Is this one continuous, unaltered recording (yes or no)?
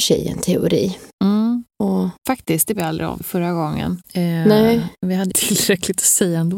no